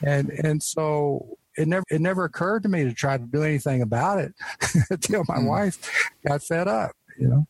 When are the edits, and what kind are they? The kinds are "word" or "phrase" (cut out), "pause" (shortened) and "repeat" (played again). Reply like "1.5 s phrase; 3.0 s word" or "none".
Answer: 1.8 s repeat